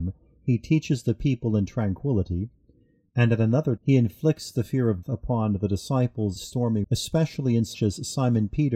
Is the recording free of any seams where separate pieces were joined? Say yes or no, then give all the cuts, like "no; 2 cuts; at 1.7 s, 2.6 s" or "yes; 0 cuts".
no; 5 cuts; at 3.8 s, 5.0 s, 6.4 s, 6.8 s, 7.7 s